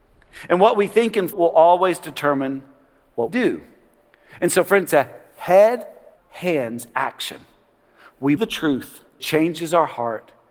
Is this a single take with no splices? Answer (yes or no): no